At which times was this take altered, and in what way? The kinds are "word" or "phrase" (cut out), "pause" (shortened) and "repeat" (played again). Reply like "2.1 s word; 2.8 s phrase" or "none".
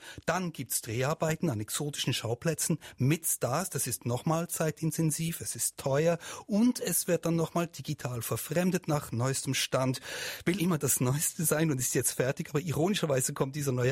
10.6 s word